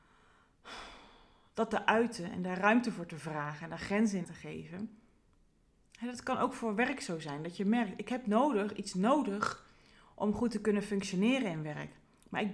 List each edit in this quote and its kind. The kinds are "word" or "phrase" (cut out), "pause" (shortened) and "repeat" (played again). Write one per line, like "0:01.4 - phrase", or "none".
0:04.2 - word